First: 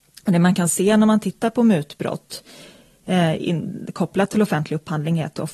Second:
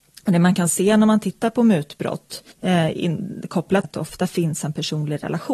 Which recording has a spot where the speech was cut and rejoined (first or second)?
second